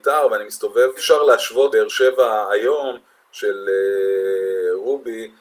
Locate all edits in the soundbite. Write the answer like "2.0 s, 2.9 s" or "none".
1.0 s, 1.7 s